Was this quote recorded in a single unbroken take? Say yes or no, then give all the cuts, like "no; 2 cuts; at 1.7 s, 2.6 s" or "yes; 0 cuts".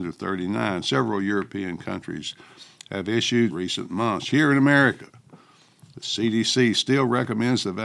no; 1 cut; at 3.5 s